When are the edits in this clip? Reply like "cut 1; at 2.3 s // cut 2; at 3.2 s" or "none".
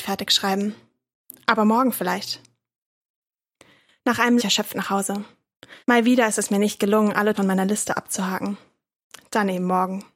cut 1; at 4.4 s // cut 2; at 5.8 s // cut 3; at 7.3 s